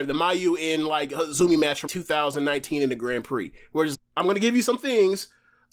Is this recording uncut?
no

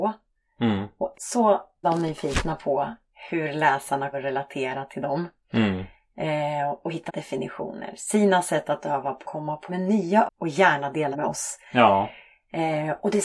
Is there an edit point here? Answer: yes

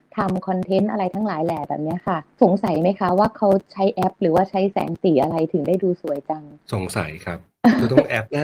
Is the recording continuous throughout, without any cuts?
no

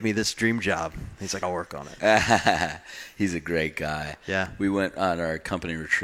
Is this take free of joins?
no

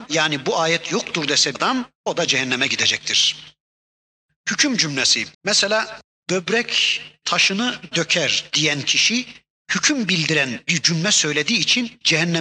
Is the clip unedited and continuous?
no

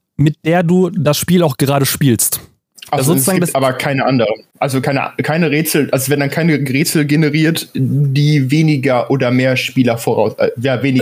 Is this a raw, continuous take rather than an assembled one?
no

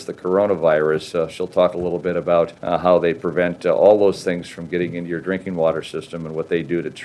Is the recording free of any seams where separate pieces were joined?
no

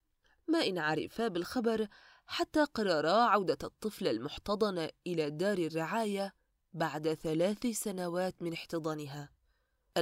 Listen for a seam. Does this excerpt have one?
no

